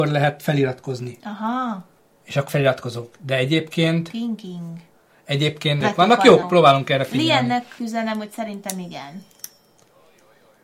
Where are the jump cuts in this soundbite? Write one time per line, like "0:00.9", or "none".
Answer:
0:02.5
0:05.8
0:06.4
0:07.8